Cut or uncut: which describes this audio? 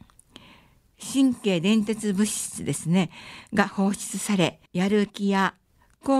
cut